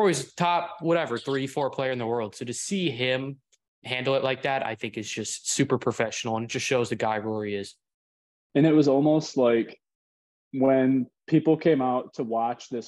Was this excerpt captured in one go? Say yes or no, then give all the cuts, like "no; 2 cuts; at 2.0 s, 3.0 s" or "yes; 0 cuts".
yes; 0 cuts